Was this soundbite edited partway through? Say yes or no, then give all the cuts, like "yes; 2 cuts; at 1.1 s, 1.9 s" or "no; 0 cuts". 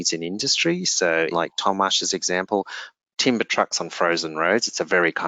yes; 2 cuts; at 1.3 s, 3.1 s